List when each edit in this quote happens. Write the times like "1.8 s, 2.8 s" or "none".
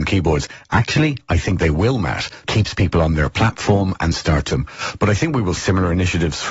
2.5 s, 4.1 s, 4.5 s, 5.6 s